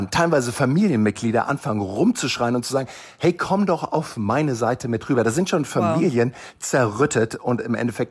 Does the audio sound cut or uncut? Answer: uncut